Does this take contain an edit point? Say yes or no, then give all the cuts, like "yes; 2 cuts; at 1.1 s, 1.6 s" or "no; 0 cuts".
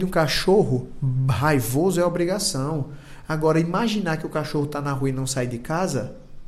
no; 0 cuts